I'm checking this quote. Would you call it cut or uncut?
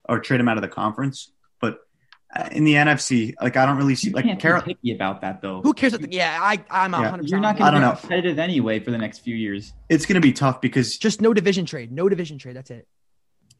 uncut